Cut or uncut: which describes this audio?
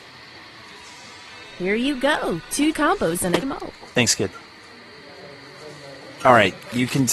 cut